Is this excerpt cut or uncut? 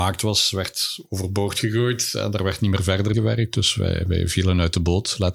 cut